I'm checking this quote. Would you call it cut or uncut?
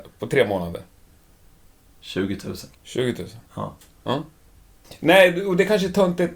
cut